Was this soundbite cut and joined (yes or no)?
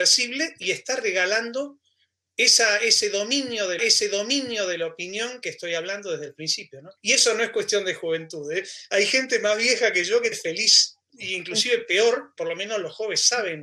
yes